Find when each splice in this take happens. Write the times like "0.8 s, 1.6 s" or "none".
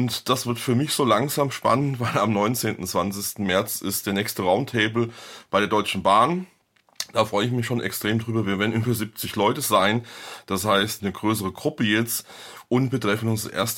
11.0 s